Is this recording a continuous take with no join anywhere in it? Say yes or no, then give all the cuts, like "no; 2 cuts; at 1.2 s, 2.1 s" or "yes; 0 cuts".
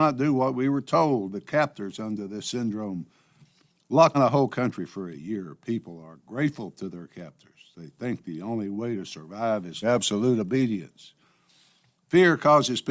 no; 3 cuts; at 2.4 s, 4.1 s, 9.8 s